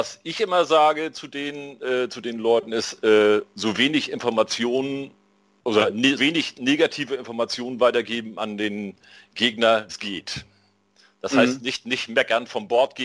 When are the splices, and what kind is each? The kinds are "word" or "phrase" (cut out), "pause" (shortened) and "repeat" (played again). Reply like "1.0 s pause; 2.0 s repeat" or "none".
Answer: 6.2 s word; 9.9 s word